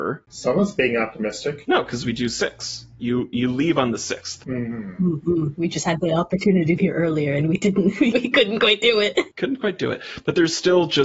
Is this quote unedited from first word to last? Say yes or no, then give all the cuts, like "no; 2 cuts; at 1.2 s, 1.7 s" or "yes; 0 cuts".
no; 2 cuts; at 6.8 s, 8.1 s